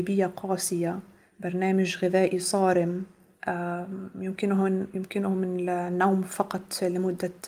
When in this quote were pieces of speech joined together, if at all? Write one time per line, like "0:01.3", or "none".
none